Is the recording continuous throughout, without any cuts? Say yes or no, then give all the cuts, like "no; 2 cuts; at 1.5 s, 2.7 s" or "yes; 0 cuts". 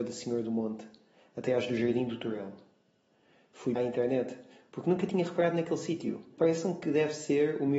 no; 2 cuts; at 3.8 s, 6.4 s